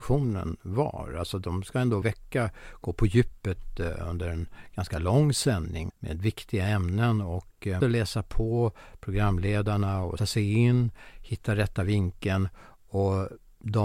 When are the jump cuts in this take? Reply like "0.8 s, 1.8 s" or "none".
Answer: 2.0 s, 5.9 s, 7.8 s, 10.2 s